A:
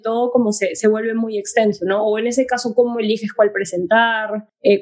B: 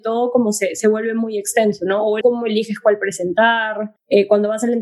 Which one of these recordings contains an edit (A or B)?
B